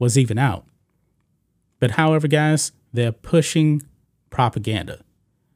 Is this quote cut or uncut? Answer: uncut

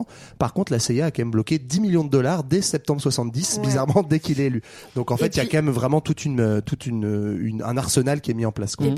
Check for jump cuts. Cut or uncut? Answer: uncut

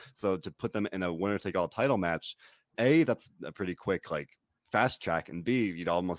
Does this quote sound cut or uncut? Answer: uncut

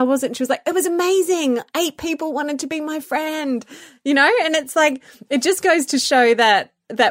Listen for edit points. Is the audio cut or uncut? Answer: uncut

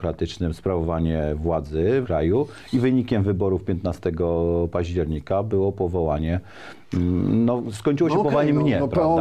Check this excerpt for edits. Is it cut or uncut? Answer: cut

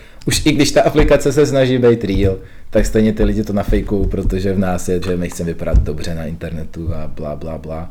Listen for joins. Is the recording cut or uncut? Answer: cut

